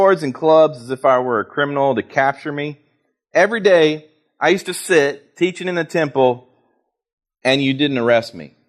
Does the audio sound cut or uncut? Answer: uncut